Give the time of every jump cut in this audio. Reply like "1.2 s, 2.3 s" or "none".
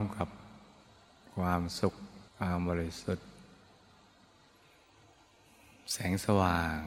2.3 s

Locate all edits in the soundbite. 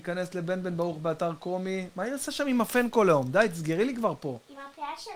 none

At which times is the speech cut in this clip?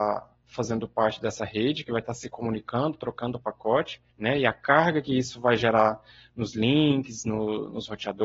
4.1 s

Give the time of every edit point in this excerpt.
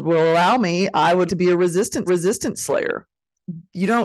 1.3 s, 2.1 s

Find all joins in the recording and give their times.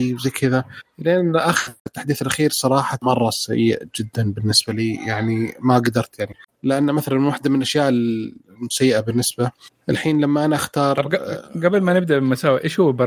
none

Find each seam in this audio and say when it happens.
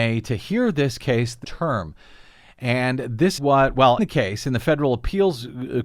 1.4 s, 3.4 s, 4.0 s

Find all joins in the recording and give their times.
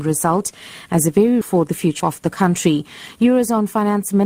1.4 s, 2.0 s

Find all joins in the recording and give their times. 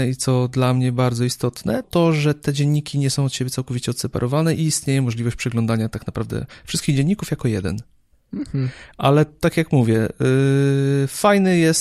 1.8 s

